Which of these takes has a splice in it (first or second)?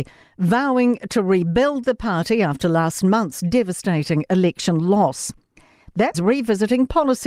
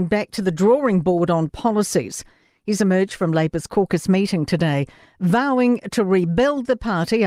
first